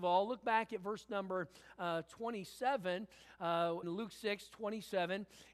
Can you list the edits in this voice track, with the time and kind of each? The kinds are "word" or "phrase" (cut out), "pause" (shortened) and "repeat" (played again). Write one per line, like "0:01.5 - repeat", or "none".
0:03.8 - word